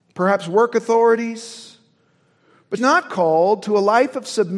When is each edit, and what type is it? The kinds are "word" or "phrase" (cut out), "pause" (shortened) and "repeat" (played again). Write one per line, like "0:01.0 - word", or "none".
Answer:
0:02.8 - word